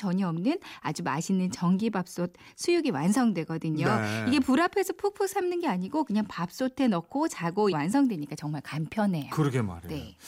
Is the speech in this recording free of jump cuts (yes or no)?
no